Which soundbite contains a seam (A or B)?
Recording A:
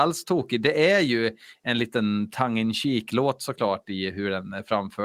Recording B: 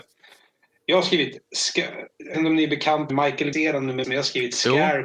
B